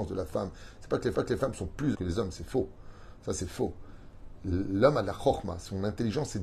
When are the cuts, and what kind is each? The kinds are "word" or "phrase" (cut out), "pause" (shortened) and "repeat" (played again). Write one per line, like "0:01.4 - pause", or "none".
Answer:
0:01.1 - repeat
0:01.9 - word